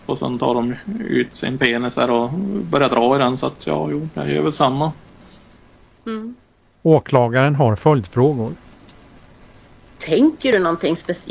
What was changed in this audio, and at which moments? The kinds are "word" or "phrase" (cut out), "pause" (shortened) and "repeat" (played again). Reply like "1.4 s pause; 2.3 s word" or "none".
none

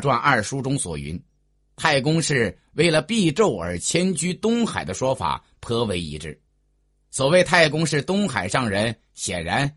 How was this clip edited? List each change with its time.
none

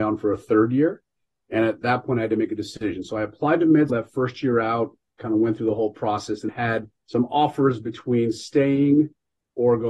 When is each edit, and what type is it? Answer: 3.9 s word; 6.5 s word; 7.0 s pause

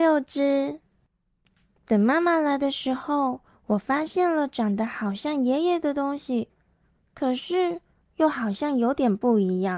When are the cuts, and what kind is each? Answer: none

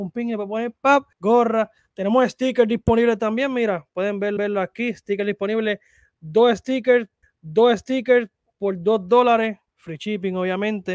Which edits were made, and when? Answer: 1.1 s pause; 4.4 s repeat; 7.2 s repeat; 9.7 s pause

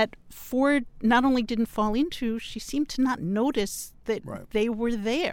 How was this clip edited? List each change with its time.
none

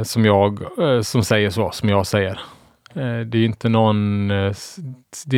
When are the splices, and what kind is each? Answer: none

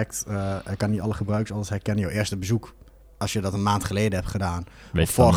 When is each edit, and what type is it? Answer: none

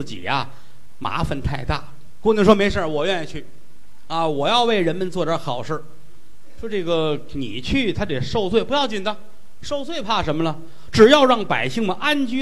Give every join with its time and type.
none

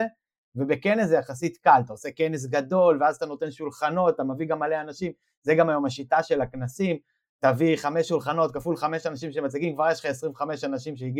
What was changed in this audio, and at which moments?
none

